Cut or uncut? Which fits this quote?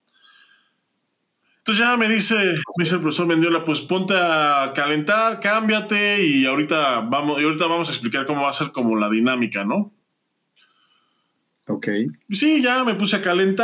uncut